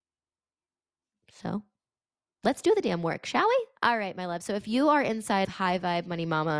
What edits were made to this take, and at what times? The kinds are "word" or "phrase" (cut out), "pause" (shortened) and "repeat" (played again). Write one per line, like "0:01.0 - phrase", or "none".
0:03.7 - pause
0:05.4 - word